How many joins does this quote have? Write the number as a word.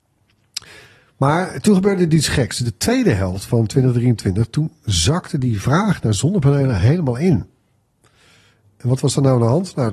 zero